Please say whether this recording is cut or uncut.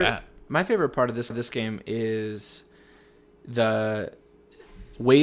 cut